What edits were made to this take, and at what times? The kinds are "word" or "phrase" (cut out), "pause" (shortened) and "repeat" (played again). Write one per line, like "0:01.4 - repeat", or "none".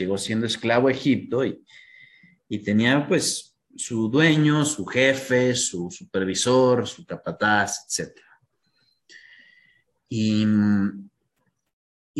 none